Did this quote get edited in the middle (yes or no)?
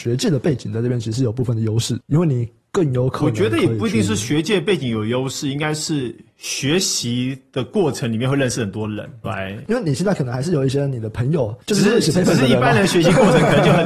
yes